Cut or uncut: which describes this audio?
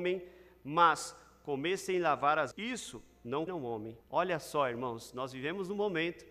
cut